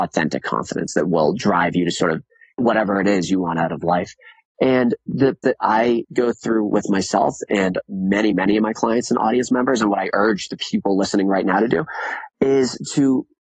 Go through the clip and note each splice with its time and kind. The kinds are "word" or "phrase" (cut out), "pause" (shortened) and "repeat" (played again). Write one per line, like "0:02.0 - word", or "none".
0:02.6 - word
0:05.4 - word
0:08.3 - word